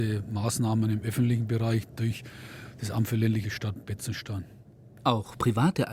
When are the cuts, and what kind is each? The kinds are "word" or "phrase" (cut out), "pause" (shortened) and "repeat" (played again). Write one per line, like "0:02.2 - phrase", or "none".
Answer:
0:03.4 - phrase